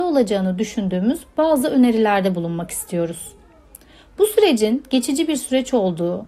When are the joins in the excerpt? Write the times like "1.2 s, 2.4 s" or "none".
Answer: none